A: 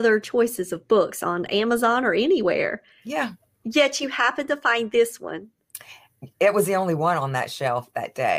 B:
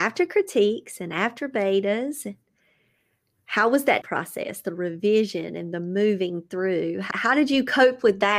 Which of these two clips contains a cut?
B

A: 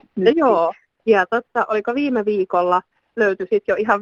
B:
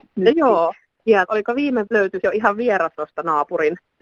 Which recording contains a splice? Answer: B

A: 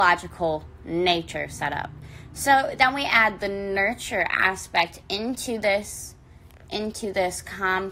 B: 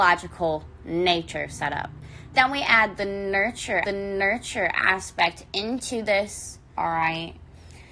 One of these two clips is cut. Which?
B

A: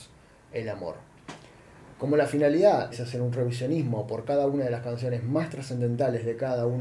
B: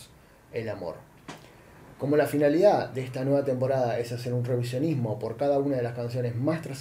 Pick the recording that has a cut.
A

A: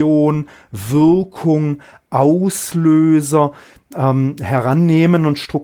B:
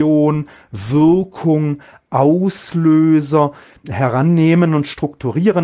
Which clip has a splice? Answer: B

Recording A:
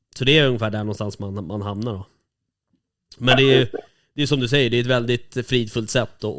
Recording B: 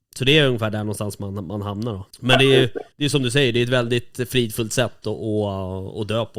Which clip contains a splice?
B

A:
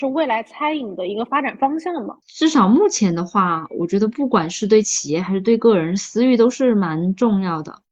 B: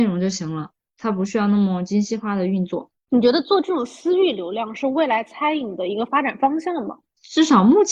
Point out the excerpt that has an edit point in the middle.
A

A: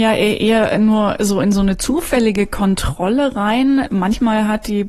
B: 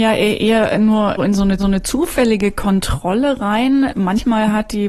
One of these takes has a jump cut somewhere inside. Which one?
B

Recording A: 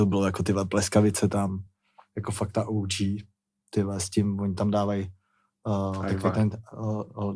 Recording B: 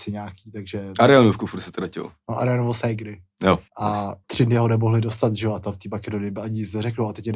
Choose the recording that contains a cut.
B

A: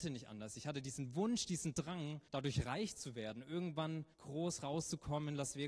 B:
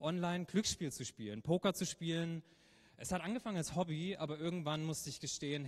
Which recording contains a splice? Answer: A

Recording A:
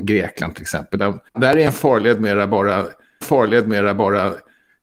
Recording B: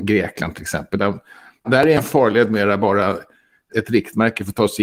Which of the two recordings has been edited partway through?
A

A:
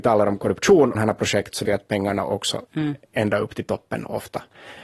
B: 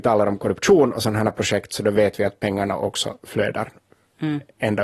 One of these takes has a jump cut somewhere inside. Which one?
A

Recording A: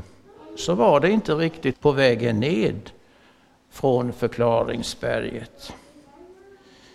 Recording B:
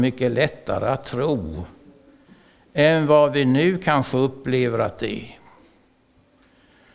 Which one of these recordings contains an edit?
A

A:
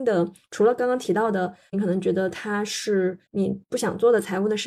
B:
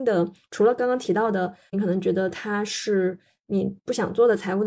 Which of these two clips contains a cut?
A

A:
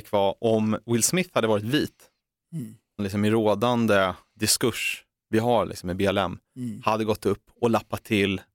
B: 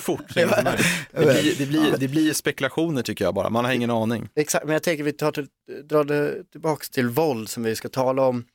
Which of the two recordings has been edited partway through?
A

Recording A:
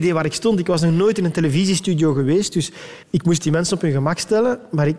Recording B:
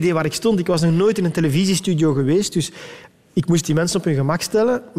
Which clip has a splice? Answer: A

